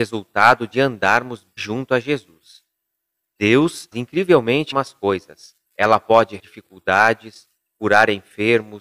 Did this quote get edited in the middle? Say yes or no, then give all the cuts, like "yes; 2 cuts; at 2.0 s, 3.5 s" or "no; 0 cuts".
yes; 5 cuts; at 1.6 s, 3.9 s, 4.7 s, 5.6 s, 6.4 s